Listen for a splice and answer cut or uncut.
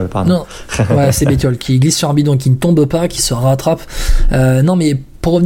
uncut